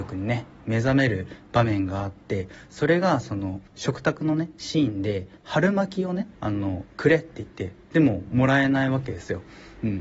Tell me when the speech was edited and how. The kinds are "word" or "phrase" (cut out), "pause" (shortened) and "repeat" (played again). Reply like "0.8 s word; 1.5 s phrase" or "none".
3.7 s pause; 5.4 s pause; 6.3 s pause